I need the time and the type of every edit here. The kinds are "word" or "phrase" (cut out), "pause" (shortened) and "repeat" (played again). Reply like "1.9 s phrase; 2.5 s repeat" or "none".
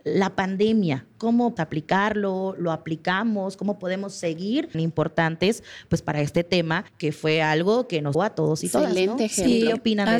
1.6 s word; 4.7 s phrase; 6.9 s pause; 8.1 s word